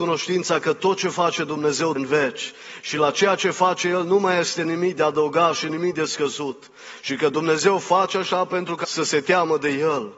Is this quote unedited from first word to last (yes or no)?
no